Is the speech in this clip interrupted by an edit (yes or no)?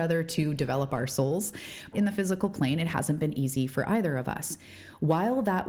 yes